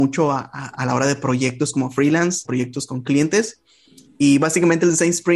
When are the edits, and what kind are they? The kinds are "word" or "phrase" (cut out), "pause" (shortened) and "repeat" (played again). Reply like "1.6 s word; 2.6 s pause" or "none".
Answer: 2.4 s word